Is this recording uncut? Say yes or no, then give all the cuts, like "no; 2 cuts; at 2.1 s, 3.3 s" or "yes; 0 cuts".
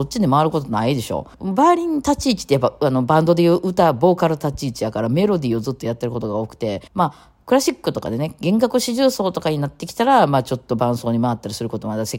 no; 2 cuts; at 1.3 s, 6.9 s